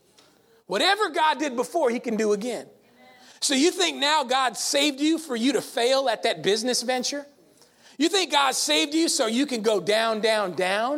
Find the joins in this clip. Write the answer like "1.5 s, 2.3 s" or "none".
none